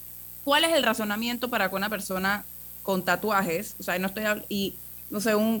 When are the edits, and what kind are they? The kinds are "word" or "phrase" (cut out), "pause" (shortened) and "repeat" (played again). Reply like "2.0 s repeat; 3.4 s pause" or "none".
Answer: none

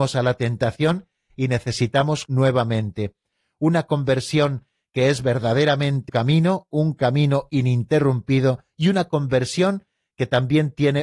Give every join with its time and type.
2.3 s word; 6.1 s word

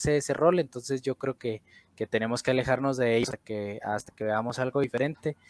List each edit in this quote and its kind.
none

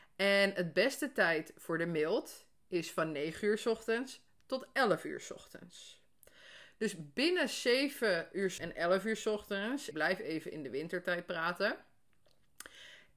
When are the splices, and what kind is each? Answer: 8.6 s word; 9.9 s word

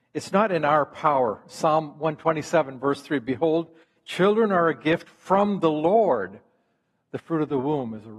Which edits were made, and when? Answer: none

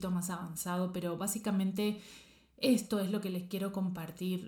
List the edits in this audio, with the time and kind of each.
none

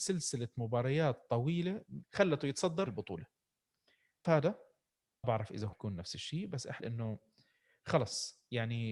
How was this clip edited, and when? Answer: 2.0 s word; 2.9 s word; 4.2 s word; 5.2 s word; 5.7 s word; 6.8 s word

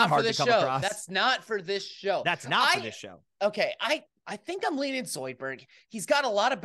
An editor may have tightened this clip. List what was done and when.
none

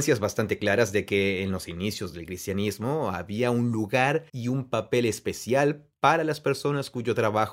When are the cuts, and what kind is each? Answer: 4.3 s pause

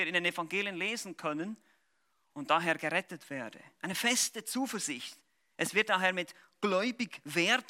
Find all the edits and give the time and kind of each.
none

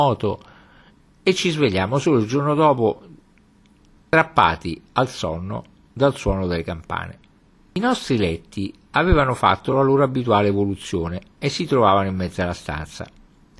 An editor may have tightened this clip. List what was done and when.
none

